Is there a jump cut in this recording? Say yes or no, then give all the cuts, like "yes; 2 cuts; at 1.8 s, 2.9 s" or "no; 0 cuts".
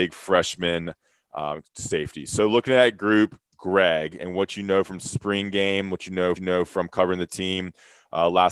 yes; 2 cuts; at 3.5 s, 6.4 s